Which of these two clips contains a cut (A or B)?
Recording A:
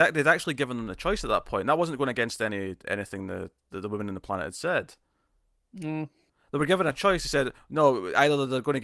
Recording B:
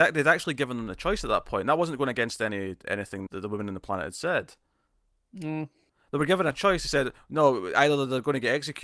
B